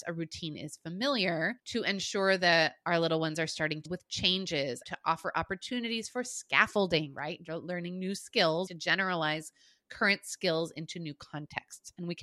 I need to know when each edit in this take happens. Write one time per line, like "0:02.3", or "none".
0:01.6
0:03.9
0:04.8
0:08.7